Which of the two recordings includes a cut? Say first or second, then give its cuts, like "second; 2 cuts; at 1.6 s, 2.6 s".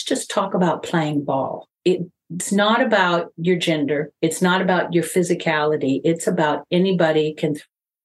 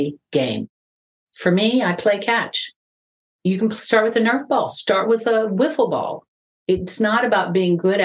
first; 1 cut; at 1.8 s